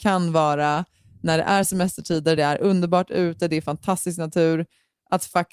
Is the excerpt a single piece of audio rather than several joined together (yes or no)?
yes